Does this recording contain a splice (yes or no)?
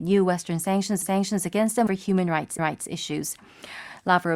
yes